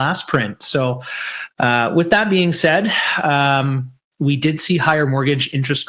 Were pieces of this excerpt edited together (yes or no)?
no